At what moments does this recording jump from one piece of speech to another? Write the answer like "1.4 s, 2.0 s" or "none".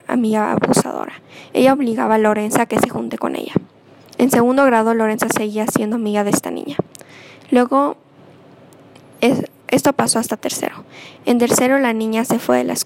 none